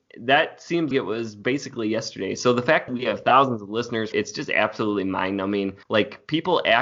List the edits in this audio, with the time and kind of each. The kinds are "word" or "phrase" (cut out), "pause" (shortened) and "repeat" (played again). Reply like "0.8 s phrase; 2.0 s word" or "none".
0.9 s word; 2.9 s word; 4.1 s phrase; 5.8 s pause